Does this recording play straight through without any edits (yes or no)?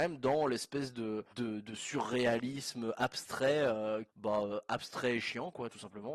no